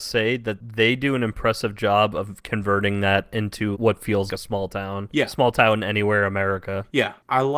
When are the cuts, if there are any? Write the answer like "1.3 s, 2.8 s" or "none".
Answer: 3.7 s, 4.3 s